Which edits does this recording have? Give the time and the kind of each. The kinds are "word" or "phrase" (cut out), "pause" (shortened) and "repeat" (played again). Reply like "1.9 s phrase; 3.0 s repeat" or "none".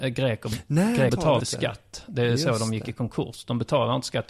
1.1 s word; 1.4 s word